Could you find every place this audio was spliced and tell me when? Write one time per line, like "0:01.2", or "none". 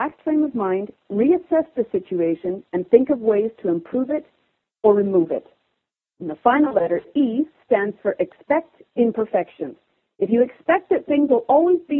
none